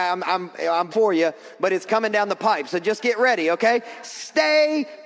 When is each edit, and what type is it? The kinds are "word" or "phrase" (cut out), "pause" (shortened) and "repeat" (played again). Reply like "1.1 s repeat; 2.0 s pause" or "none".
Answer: 0.9 s word